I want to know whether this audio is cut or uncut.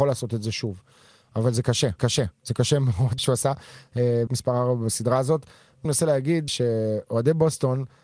cut